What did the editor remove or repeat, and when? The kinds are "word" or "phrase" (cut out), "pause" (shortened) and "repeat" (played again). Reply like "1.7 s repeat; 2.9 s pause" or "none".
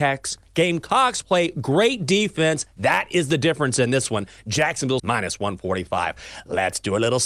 5.0 s phrase